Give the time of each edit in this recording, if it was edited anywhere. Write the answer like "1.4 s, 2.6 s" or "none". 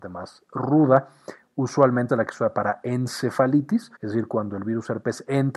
2.1 s, 4.0 s